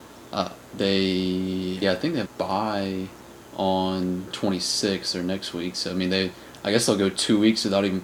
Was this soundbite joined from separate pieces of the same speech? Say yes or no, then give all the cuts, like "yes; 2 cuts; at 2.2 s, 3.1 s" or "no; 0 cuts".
yes; 3 cuts; at 1.8 s, 2.3 s, 4.3 s